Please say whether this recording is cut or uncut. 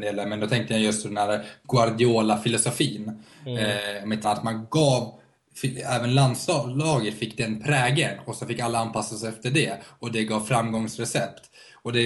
cut